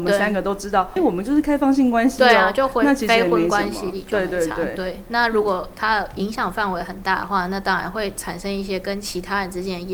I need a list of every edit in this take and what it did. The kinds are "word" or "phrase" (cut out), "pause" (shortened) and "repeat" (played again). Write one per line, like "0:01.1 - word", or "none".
0:01.0 - word